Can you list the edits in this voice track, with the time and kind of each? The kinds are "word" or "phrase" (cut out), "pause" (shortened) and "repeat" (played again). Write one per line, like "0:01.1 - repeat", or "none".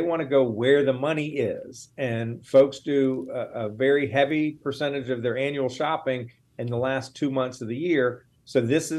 none